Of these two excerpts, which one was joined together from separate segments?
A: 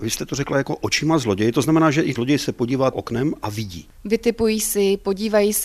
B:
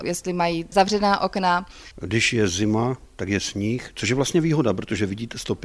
A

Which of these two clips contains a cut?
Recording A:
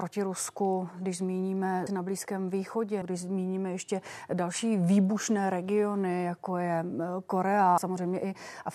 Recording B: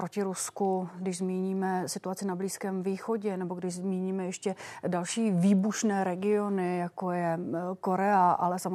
A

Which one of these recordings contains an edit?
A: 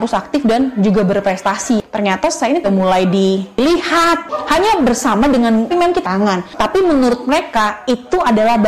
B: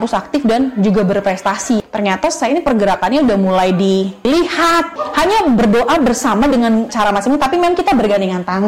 A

